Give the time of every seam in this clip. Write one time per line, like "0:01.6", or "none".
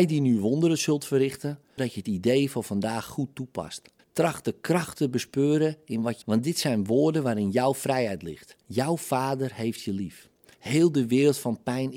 0:01.8
0:04.0
0:06.2
0:08.6